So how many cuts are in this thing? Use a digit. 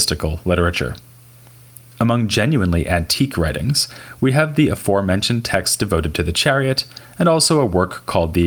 0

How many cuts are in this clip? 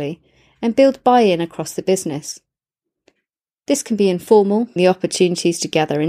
1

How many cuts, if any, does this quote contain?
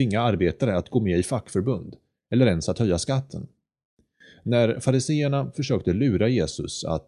0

